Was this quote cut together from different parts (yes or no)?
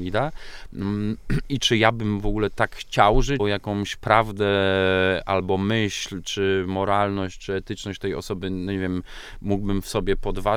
yes